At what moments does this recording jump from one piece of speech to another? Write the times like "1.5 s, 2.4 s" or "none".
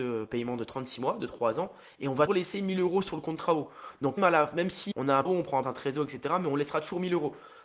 2.3 s, 4.2 s, 4.9 s, 5.2 s, 5.6 s